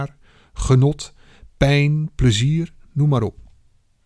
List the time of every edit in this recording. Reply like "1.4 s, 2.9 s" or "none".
none